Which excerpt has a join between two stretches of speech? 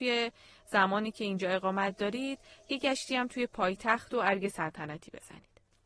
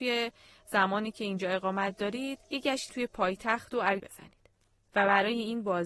second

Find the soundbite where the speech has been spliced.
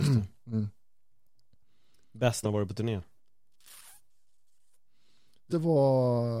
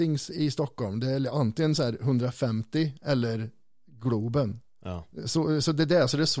first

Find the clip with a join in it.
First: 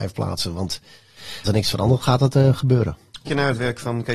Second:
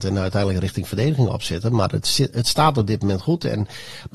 first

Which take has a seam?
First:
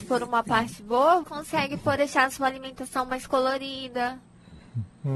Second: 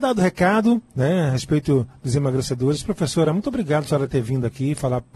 first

